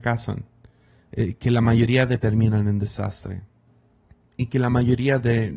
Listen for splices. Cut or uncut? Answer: cut